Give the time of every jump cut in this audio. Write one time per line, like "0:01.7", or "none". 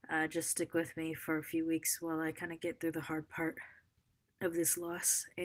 none